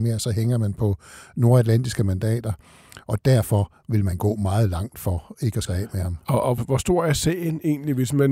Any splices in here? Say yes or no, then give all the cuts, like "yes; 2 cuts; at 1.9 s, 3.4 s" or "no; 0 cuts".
yes; 2 cuts; at 5.7 s, 6.6 s